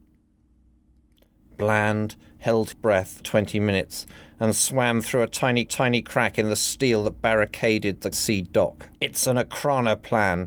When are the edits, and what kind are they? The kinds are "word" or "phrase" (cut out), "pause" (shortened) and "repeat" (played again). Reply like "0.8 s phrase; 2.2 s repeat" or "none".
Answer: 2.7 s word; 3.2 s word; 5.7 s repeat; 8.1 s word; 8.9 s pause